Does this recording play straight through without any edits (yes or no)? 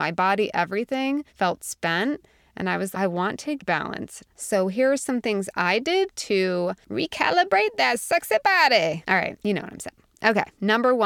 no